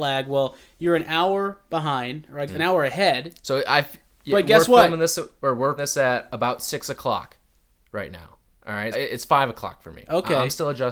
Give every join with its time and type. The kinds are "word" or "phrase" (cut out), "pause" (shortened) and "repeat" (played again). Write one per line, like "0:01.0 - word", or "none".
0:02.5 - word
0:05.8 - word
0:08.9 - word